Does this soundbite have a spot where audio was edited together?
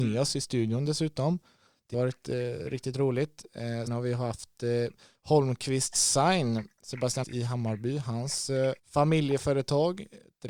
yes; 4 cuts; at 1.9 s, 3.9 s, 7.2 s, 8.8 s

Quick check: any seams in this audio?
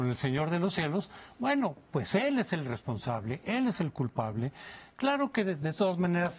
no; 0 cuts

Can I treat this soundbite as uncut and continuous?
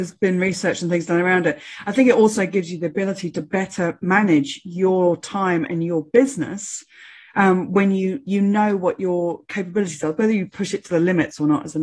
yes; 0 cuts

